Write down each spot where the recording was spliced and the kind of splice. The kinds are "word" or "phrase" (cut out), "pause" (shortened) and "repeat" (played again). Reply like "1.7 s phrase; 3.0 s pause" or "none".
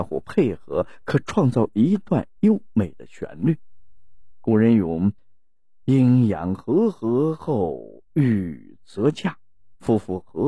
5.2 s pause